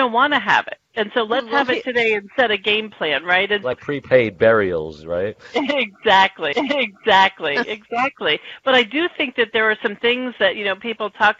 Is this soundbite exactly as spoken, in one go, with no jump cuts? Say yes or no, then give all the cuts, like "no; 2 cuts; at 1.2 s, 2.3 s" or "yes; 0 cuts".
no; 2 cuts; at 3.7 s, 6.5 s